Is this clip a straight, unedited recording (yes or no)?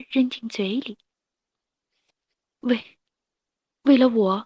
yes